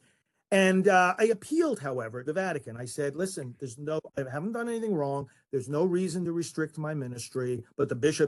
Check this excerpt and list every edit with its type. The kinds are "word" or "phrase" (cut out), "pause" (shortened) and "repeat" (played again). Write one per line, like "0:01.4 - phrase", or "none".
0:02.3 - word